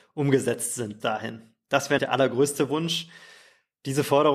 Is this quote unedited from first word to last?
no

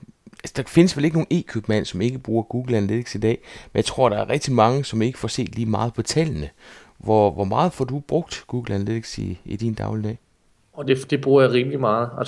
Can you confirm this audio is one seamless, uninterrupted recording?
yes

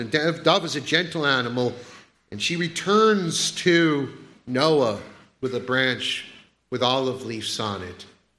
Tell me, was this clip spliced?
no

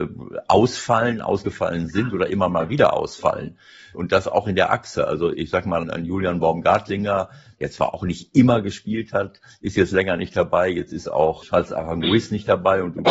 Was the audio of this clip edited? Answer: yes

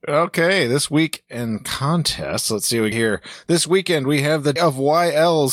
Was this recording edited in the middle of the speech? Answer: yes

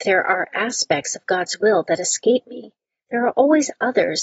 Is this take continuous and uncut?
yes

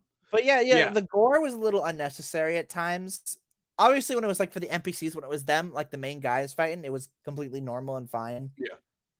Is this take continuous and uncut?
yes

